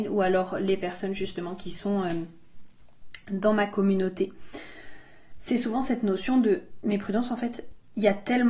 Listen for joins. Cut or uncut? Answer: uncut